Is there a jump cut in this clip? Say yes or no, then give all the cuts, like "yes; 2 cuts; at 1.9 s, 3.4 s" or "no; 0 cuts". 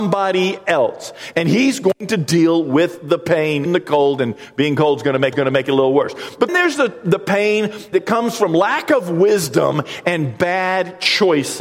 yes; 4 cuts; at 3.7 s, 5.3 s, 6.5 s, 7.9 s